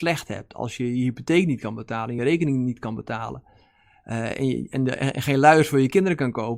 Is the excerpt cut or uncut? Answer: uncut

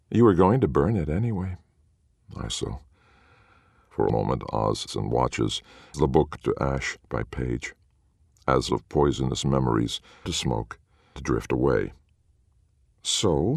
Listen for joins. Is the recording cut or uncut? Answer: cut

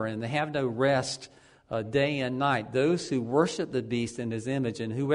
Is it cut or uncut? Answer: uncut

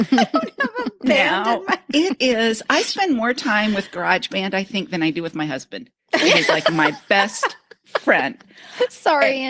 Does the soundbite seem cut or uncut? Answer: uncut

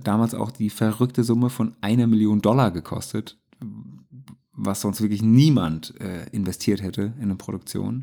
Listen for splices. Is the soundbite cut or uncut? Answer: uncut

